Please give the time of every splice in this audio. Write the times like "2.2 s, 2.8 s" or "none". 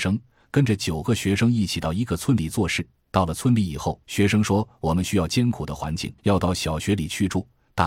4.0 s, 6.2 s